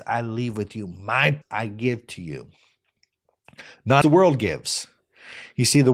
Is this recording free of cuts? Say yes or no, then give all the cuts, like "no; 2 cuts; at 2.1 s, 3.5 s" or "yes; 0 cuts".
no; 2 cuts; at 1.4 s, 4.0 s